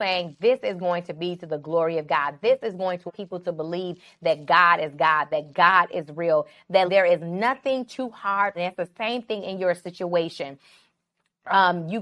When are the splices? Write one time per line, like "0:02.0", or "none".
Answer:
0:03.1
0:06.9
0:08.5